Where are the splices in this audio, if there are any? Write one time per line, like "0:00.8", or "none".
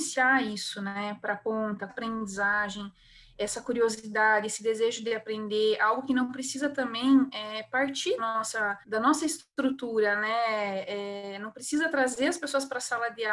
0:01.9
0:08.2
0:08.8